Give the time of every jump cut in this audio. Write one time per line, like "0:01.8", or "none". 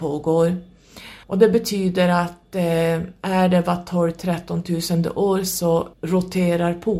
0:01.2
0:05.9